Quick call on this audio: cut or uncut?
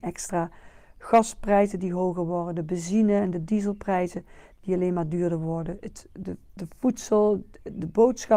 uncut